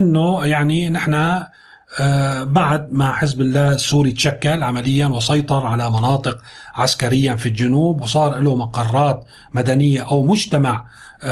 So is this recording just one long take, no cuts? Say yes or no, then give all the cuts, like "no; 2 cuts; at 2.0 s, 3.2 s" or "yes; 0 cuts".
yes; 0 cuts